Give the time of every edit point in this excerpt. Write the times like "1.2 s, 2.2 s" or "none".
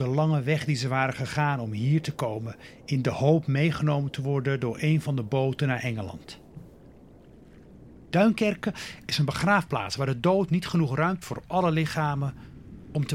11.2 s